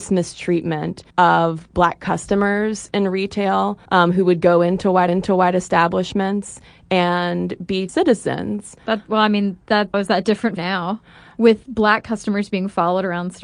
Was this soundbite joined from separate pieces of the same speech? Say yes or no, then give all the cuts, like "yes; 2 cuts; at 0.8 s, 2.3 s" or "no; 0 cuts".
yes; 6 cuts; at 1.1 s, 3.8 s, 5.1 s, 7.9 s, 9.9 s, 10.6 s